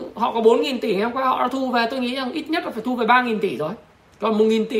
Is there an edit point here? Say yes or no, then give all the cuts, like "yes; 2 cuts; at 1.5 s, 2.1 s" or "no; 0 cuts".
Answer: no; 0 cuts